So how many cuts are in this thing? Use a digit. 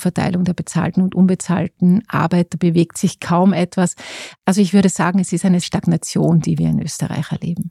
1